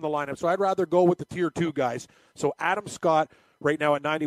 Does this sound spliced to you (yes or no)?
no